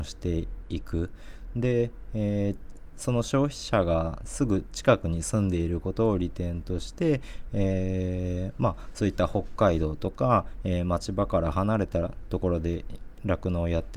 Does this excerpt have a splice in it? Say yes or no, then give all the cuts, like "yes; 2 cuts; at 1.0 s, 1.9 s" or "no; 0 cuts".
no; 0 cuts